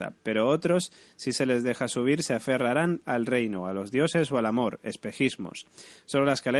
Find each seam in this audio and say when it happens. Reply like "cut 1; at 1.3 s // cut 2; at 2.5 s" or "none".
none